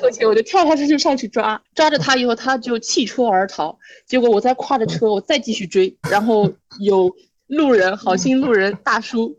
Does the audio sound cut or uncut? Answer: cut